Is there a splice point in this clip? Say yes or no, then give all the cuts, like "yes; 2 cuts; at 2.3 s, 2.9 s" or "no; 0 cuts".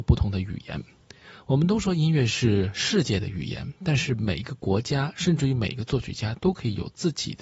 no; 0 cuts